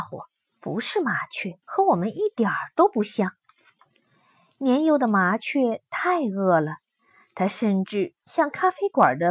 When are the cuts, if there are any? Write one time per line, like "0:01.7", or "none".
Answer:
0:01.6